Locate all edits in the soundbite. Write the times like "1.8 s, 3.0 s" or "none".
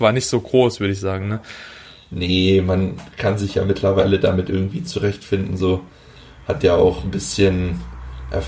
none